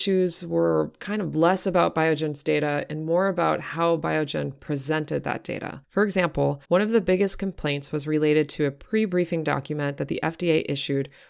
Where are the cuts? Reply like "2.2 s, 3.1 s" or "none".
5.8 s, 6.6 s